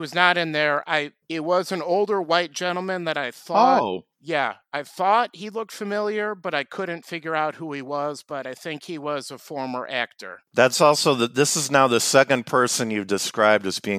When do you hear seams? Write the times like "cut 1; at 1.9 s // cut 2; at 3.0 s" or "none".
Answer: cut 1; at 1.2 s // cut 2; at 4.1 s // cut 3; at 10.5 s